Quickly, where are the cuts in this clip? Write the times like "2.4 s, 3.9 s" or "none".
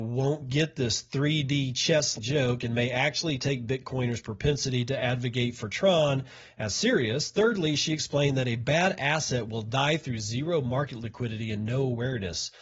2.1 s